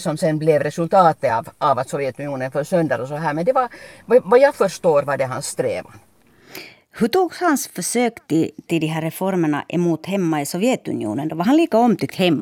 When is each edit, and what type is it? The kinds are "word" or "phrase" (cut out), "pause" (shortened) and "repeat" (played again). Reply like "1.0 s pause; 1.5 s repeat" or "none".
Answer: none

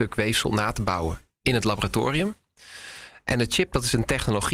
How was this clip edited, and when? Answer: none

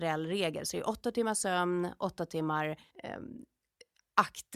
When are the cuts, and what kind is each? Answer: 2.9 s pause

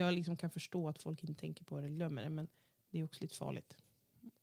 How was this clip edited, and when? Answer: none

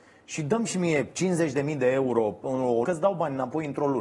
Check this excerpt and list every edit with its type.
2.4 s word; 2.8 s word

